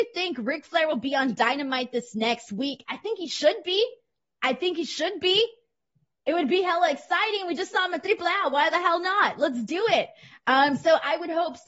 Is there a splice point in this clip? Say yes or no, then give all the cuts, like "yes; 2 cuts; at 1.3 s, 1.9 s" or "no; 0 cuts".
no; 0 cuts